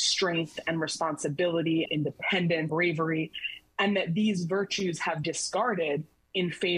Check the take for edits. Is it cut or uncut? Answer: cut